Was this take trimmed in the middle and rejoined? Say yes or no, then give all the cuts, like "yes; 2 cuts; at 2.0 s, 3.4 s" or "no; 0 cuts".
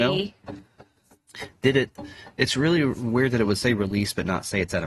no; 0 cuts